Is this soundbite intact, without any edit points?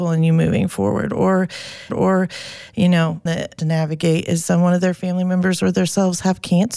no; 3 cuts; at 1.9 s, 3.3 s, 3.6 s

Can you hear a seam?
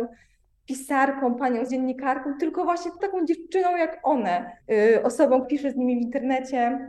yes; 4 cuts; at 1.7 s, 3.0 s, 4.6 s, 5.4 s

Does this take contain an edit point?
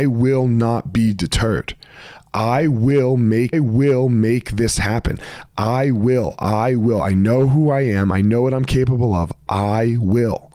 yes; 1 cut; at 3.5 s

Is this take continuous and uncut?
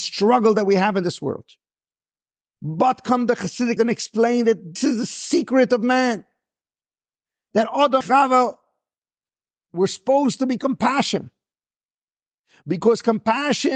no; 4 cuts; at 3.8 s, 4.8 s, 8.0 s, 10.6 s

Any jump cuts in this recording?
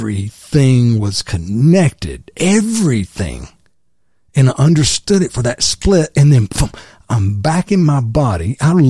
no; 0 cuts

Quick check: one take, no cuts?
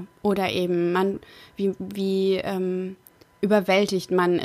yes; 0 cuts

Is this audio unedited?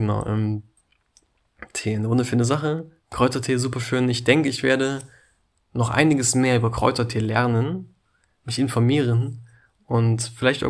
yes; 0 cuts

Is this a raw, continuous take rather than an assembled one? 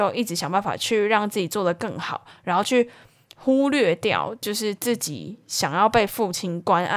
yes; 0 cuts

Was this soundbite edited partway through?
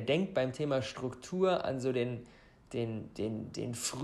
no; 0 cuts

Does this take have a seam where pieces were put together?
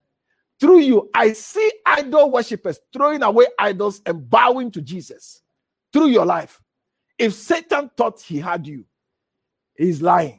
no; 0 cuts

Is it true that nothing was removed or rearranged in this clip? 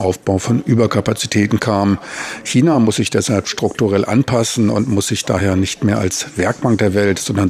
yes; 0 cuts

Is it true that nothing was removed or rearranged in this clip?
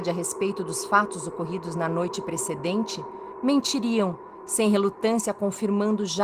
yes; 0 cuts

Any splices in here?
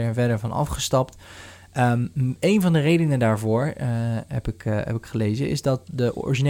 no; 0 cuts

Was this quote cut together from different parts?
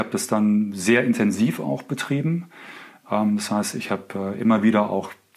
no; 0 cuts

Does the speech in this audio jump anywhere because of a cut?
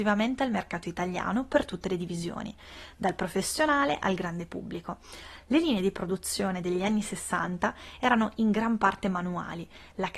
no; 0 cuts

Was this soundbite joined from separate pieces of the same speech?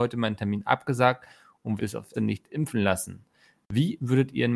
yes; 2 cuts; at 1.8 s, 2.1 s

